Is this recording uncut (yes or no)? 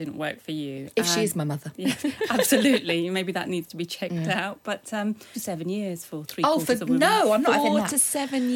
no